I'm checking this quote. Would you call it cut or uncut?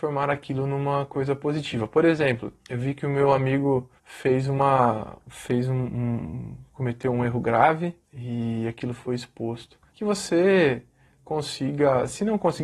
cut